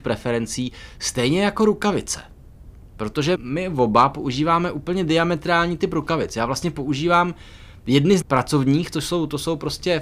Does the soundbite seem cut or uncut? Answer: cut